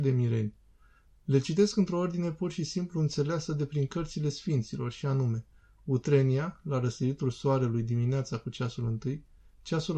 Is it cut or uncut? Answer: uncut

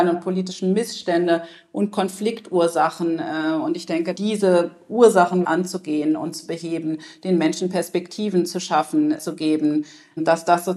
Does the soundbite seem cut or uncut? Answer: cut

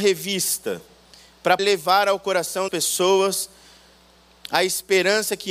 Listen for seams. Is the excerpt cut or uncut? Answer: cut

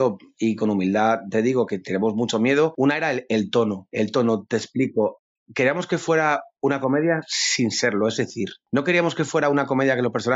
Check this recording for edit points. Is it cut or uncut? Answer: uncut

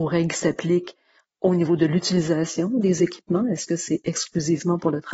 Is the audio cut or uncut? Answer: uncut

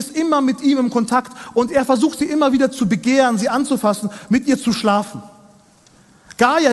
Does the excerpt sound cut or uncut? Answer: uncut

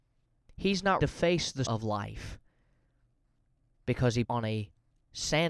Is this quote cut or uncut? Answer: cut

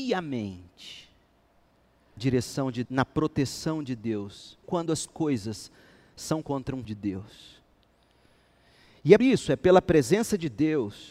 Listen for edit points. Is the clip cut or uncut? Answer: cut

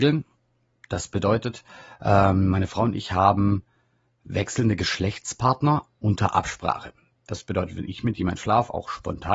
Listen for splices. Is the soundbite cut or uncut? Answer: uncut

